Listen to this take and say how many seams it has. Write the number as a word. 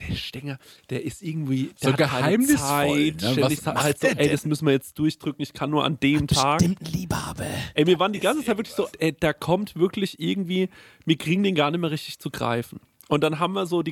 one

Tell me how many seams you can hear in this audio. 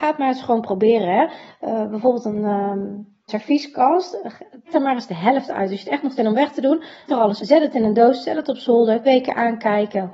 six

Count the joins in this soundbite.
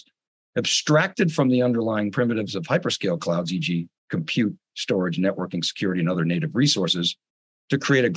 one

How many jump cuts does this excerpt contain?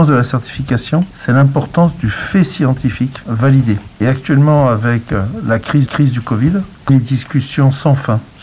two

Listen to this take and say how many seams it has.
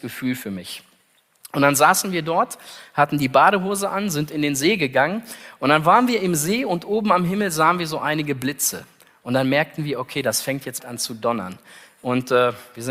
one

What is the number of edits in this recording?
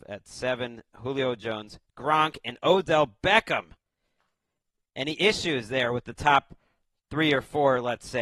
zero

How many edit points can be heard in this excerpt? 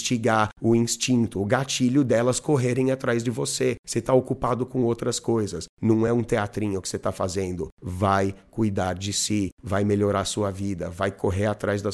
zero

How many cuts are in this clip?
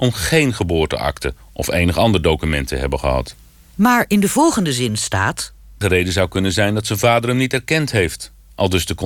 one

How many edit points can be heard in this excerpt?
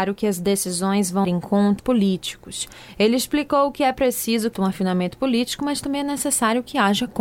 three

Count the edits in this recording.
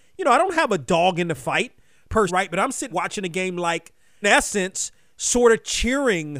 three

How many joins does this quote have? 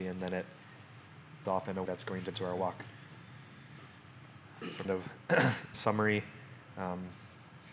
five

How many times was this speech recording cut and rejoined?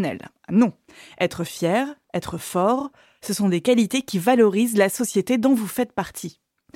zero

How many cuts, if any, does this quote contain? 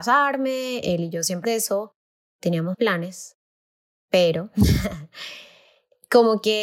three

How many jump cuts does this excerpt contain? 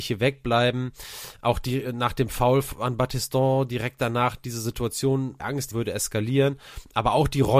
two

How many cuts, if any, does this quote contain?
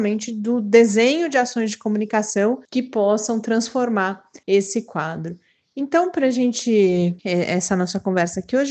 three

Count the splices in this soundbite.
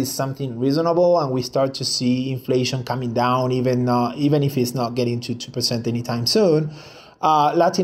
zero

